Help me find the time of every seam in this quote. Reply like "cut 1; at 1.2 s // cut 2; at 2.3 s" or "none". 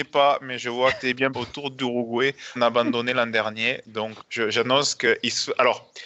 cut 1; at 0.9 s // cut 2; at 1.3 s // cut 3; at 2.6 s // cut 4; at 4.2 s